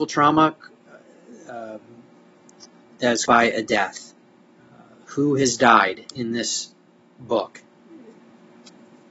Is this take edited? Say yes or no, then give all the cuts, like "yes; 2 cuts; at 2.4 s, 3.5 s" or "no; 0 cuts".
yes; 2 cuts; at 3.3 s, 4.4 s